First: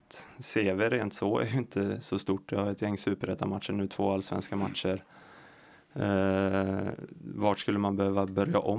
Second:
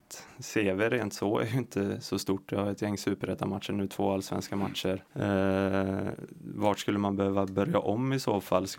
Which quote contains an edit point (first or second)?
second